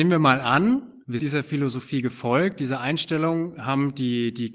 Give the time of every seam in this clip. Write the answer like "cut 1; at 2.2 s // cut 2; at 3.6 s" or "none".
cut 1; at 1.2 s